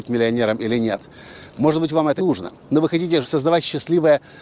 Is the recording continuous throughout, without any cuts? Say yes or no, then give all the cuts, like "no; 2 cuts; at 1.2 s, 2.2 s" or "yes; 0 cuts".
no; 2 cuts; at 2.2 s, 3.2 s